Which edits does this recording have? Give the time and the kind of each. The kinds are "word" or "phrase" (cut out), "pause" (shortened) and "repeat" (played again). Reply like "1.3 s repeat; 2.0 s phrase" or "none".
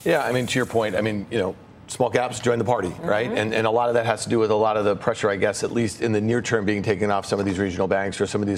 none